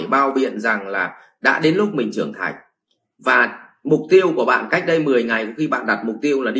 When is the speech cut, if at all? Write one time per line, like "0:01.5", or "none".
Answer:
none